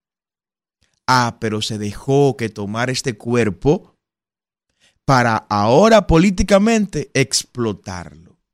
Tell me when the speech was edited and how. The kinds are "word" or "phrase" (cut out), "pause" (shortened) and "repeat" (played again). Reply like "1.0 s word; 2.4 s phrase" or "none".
none